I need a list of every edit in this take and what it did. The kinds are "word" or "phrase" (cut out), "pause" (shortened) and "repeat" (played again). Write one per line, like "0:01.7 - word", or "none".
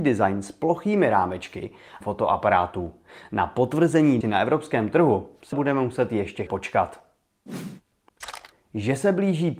0:02.0 - phrase
0:04.2 - word
0:05.5 - word
0:06.5 - word